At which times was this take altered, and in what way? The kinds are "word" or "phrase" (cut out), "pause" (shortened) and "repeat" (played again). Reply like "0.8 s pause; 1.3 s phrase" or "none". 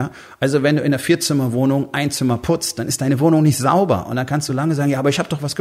none

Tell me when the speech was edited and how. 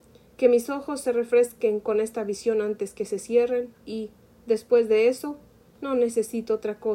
none

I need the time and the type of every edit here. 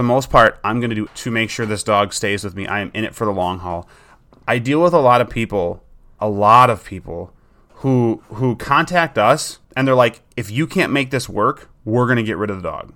1.1 s phrase; 6.2 s word; 9.6 s pause

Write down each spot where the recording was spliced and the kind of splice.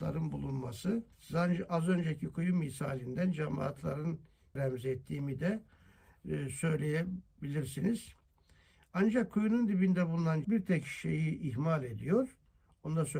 1.1 s pause; 4.6 s word; 10.4 s word

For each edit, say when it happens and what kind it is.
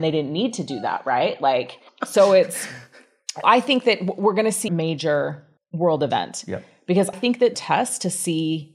1.9 s pause; 3.4 s word; 4.7 s word; 5.6 s pause; 7.1 s word; 7.5 s phrase

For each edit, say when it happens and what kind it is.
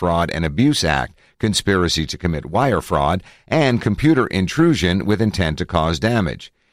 none

